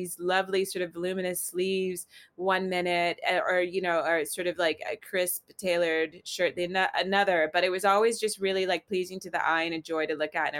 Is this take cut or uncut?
uncut